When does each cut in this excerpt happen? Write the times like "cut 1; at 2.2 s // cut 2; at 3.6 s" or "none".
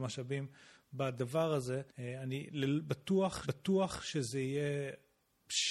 cut 1; at 1.9 s // cut 2; at 3.4 s